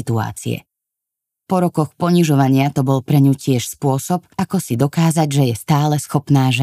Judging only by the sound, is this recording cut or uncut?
cut